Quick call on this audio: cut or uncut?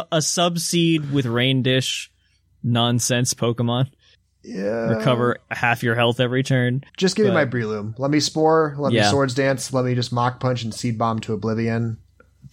cut